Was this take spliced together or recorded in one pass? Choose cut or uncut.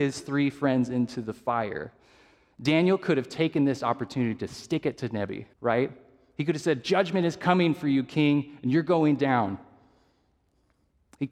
cut